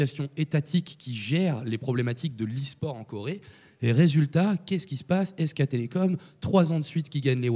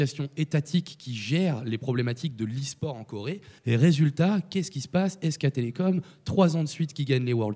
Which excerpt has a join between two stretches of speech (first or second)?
second